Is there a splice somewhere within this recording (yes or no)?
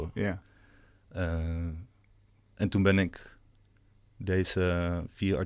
no